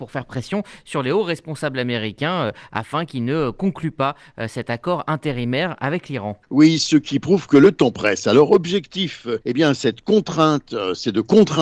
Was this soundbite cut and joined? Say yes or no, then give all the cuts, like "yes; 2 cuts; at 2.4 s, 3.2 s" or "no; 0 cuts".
yes; 2 cuts; at 6.4 s, 9.4 s